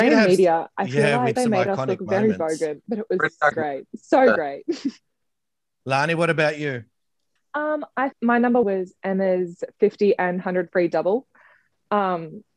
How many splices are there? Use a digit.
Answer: 6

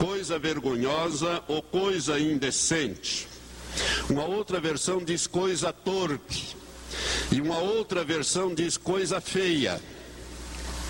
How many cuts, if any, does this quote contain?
0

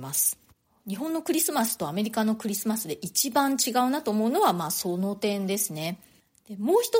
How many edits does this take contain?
0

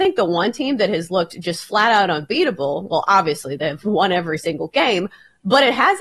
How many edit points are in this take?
0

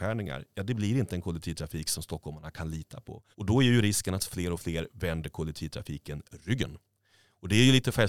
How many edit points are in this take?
1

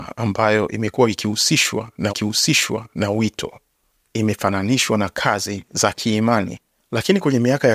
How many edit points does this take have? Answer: 1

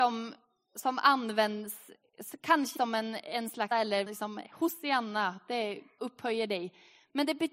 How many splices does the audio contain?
4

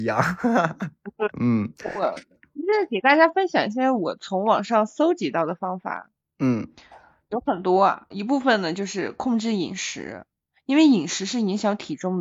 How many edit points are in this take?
2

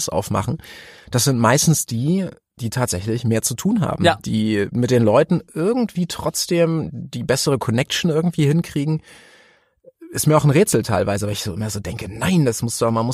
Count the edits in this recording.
1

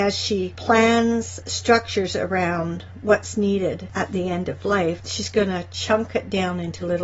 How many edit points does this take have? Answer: 0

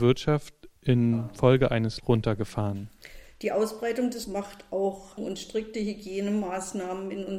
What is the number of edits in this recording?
3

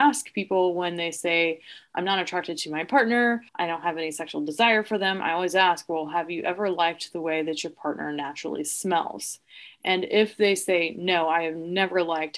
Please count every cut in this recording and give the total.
1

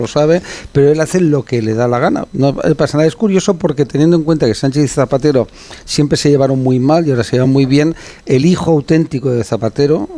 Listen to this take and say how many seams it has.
0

